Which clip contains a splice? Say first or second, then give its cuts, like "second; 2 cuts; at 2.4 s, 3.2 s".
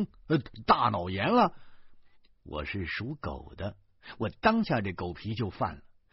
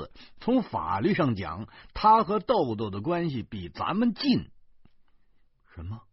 first; 1 cut; at 2.1 s